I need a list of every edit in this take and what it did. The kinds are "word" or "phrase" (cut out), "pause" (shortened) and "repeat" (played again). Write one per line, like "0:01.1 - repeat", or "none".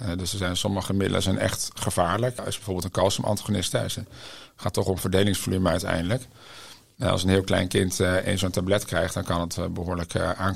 none